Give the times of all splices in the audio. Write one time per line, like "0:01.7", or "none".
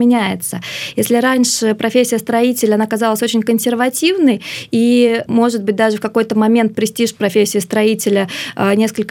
none